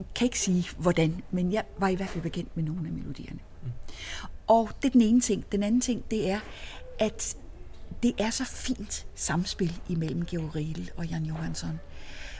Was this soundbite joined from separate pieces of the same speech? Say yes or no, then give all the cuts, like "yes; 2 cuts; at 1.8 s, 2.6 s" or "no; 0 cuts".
no; 0 cuts